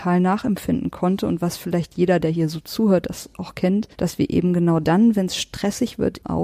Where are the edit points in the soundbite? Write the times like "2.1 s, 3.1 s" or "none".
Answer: 3.9 s